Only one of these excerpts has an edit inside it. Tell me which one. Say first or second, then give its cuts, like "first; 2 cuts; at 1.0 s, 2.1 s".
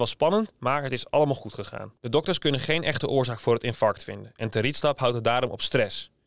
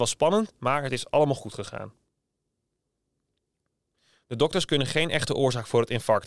first; 1 cut; at 2.0 s